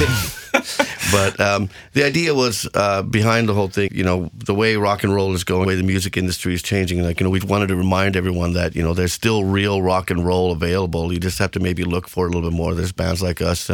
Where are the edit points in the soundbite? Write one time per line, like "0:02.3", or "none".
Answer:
0:03.9
0:05.6
0:07.4

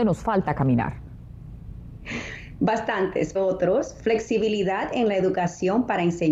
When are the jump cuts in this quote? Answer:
0:03.4

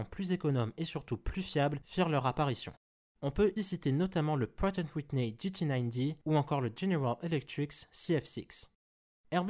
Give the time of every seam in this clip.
0:03.6

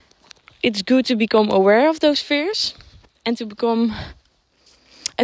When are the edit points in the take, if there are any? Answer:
none

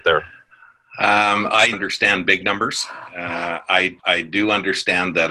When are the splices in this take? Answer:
0:01.7
0:04.0

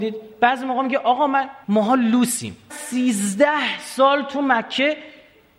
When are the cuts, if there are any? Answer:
0:01.6
0:02.7

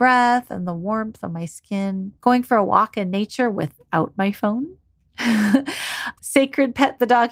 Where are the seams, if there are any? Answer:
0:02.2
0:06.2

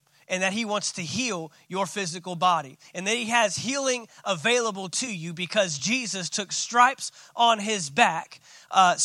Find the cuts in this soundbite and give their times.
none

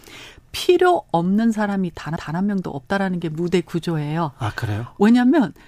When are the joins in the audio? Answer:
0:02.2

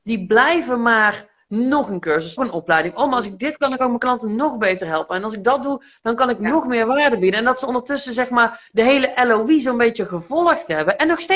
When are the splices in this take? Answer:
0:02.4

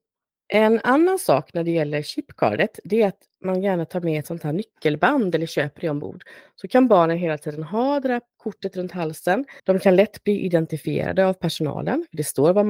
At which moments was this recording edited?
0:09.6

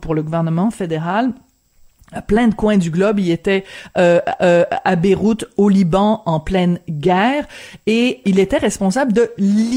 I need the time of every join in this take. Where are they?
0:04.4
0:08.2

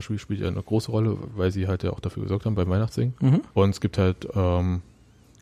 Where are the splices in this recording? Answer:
0:03.5

